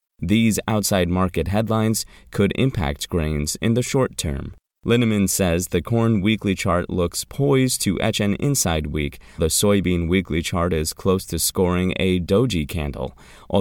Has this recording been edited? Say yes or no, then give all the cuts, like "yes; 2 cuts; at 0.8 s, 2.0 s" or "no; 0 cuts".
yes; 1 cut; at 9.4 s